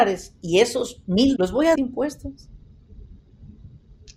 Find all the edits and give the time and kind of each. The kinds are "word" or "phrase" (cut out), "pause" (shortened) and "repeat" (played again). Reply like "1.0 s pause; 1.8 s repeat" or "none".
1.4 s word; 1.8 s word